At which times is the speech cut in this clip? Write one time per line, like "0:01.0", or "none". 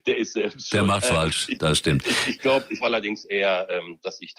0:01.0
0:02.8